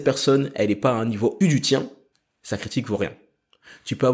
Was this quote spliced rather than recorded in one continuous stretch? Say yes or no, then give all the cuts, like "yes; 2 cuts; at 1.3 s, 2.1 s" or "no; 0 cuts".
yes; 2 cuts; at 1.4 s, 2.1 s